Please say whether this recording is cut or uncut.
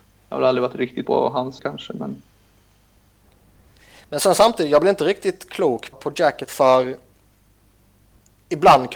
cut